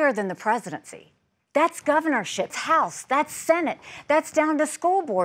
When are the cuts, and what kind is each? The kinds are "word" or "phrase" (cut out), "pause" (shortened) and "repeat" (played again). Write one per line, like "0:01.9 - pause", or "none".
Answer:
0:02.5 - word